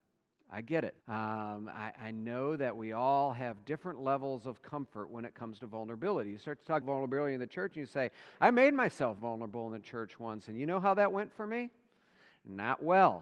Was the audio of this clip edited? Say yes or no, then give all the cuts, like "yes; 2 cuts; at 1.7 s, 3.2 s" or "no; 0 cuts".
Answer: yes; 2 cuts; at 1.0 s, 6.8 s